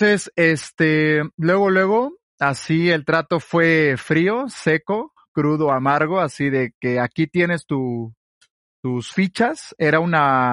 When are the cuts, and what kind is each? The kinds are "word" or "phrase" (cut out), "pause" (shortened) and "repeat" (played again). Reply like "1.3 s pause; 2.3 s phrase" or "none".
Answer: none